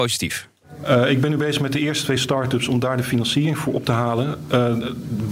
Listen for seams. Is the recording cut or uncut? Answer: uncut